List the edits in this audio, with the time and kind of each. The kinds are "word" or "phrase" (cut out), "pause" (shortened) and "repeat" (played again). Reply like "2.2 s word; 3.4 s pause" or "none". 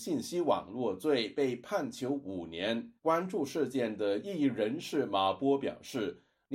3.0 s pause